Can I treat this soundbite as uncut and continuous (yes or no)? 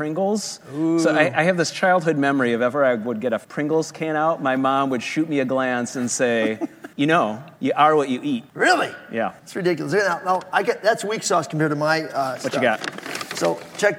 no